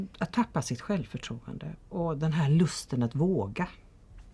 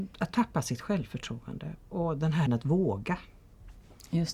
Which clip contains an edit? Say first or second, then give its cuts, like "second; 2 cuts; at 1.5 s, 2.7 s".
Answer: second; 1 cut; at 2.5 s